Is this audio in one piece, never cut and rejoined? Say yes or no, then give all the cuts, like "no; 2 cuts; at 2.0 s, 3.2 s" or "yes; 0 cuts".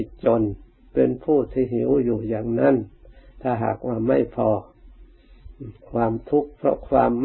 yes; 0 cuts